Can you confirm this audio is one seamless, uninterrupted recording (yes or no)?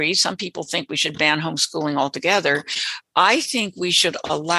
no